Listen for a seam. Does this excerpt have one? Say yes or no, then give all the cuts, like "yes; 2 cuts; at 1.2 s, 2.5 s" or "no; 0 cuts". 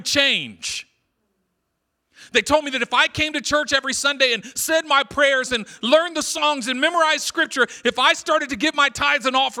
no; 0 cuts